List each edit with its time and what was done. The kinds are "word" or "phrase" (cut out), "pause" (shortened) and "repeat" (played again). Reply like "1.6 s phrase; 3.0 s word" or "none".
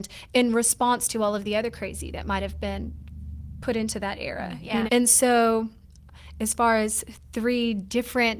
4.9 s word